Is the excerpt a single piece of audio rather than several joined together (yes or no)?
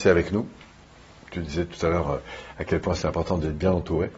yes